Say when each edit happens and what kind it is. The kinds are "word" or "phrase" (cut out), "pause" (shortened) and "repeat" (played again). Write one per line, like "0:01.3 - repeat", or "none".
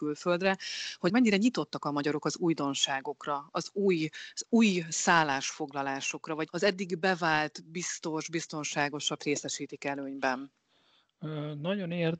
0:01.1 - word
0:06.5 - word
0:09.2 - word